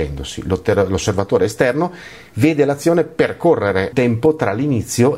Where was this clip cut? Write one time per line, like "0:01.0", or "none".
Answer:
0:03.9